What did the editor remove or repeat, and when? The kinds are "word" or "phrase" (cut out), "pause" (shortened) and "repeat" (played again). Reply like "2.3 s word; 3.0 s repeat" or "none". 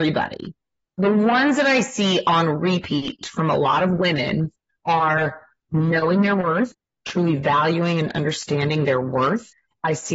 none

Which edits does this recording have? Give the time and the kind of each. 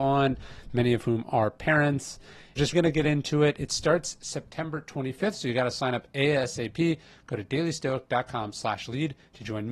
2.7 s word

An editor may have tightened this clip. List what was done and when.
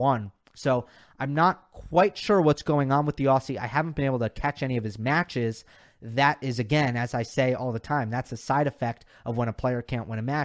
none

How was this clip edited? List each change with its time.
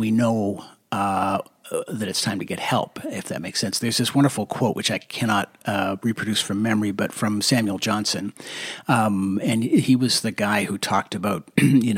none

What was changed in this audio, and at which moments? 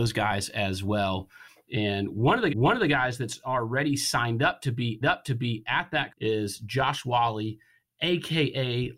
2.5 s repeat; 5.0 s repeat; 6.1 s word

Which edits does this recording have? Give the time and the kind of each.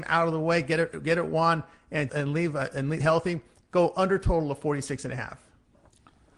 2.1 s word; 3.0 s word

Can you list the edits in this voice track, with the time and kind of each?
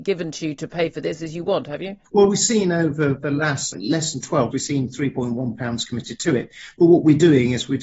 2.1 s pause; 3.7 s word; 4.5 s word; 5.6 s word

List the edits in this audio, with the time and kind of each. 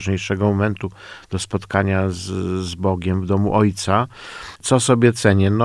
none

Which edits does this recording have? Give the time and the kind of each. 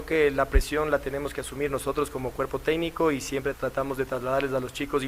3.5 s word

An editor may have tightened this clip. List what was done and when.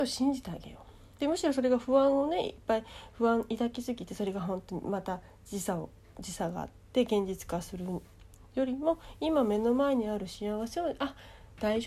1.1 s pause

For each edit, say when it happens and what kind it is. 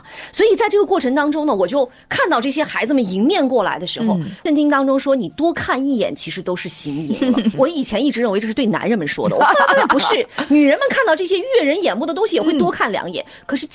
4.4 s pause

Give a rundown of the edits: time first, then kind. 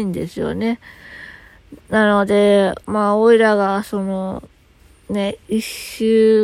1.8 s pause; 2.8 s pause; 4.8 s pause

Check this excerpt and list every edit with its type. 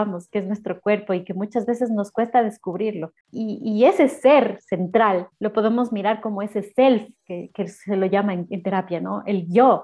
5.3 s pause

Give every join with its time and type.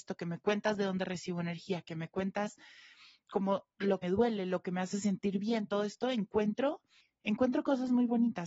4.0 s word; 7.0 s pause

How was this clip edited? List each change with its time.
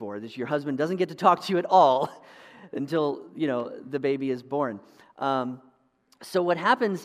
none

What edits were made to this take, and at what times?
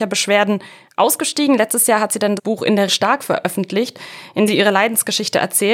2.4 s word; 2.9 s word; 4.5 s word

